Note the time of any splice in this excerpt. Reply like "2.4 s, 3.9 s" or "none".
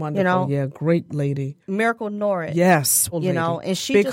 1.1 s, 1.6 s, 3.1 s